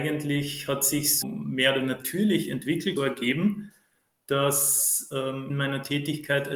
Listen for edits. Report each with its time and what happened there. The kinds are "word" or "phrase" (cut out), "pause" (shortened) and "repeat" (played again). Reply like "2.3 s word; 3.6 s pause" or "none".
1.2 s word; 1.8 s word; 3.0 s phrase; 5.5 s phrase